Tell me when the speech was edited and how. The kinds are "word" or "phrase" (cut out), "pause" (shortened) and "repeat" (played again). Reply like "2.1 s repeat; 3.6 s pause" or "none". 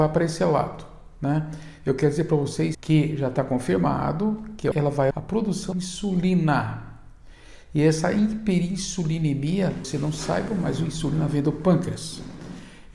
2.7 s word; 4.7 s word; 5.1 s word; 5.7 s word; 9.8 s word